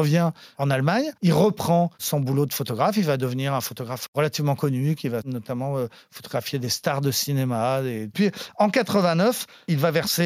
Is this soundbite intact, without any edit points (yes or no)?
no